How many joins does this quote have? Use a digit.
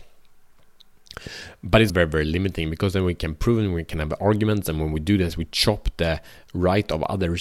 1